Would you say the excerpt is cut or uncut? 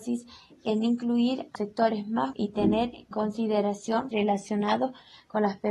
cut